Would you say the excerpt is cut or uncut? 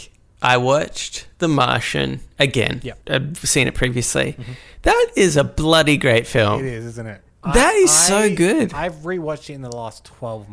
cut